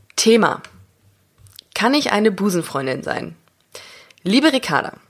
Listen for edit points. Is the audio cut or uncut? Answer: uncut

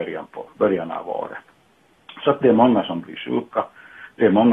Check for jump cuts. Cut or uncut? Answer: uncut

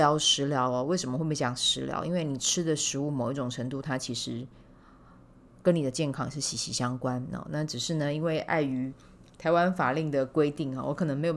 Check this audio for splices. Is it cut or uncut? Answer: uncut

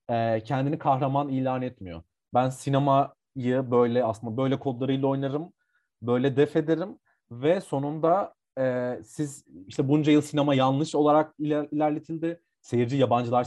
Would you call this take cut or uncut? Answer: uncut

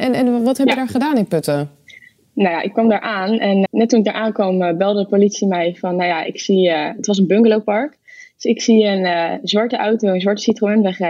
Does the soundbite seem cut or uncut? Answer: cut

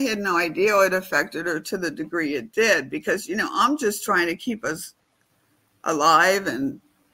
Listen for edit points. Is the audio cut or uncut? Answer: uncut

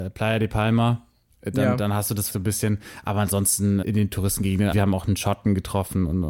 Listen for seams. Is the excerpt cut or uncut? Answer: cut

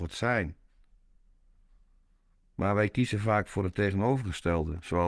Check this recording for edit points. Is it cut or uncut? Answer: uncut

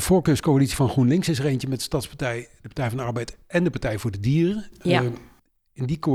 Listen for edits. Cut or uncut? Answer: uncut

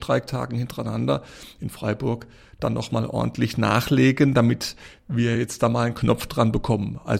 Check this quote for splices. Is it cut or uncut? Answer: uncut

